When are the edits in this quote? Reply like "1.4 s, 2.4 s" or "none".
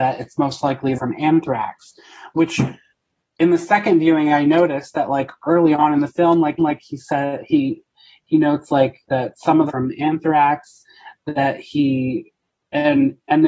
0.9 s, 6.6 s, 9.7 s

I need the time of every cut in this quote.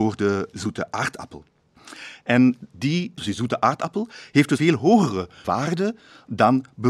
3.2 s, 4.6 s, 5.4 s

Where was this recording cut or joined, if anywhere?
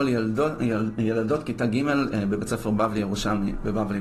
none

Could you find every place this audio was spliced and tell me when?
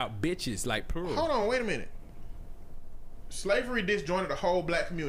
none

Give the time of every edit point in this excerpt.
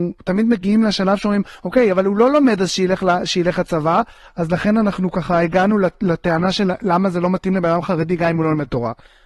none

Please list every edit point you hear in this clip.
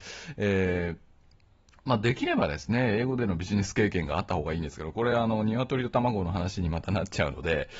none

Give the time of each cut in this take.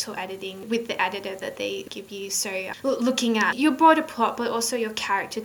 none

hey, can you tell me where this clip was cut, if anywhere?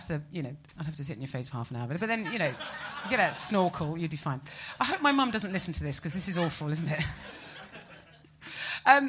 none

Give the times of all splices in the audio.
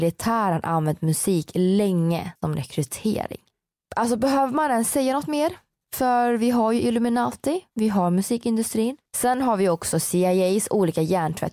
2.4 s, 9.1 s

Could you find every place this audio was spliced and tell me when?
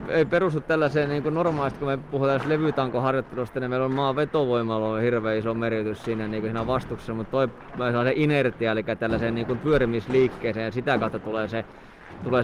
none

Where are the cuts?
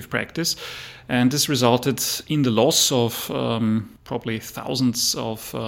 4.0 s

